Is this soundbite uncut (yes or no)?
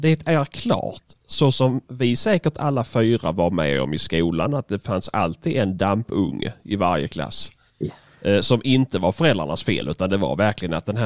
yes